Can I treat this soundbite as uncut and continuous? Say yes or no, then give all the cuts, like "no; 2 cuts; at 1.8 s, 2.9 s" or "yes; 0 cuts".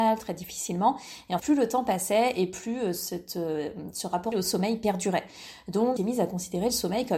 no; 3 cuts; at 1.4 s, 4.3 s, 6.0 s